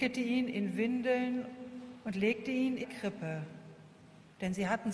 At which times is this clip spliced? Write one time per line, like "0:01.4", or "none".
0:02.8

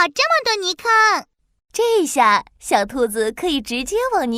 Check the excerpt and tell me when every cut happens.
none

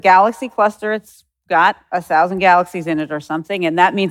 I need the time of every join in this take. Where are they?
none

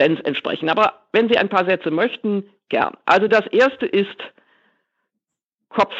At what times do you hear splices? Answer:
none

